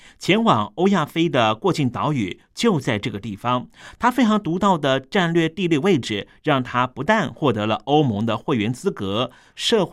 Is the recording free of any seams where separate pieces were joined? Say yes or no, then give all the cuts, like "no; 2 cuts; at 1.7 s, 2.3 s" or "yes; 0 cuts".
yes; 0 cuts